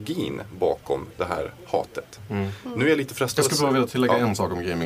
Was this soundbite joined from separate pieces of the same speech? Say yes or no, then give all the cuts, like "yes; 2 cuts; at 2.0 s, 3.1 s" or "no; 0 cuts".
no; 0 cuts